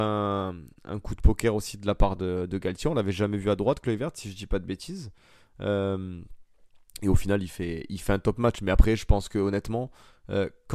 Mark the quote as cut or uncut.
uncut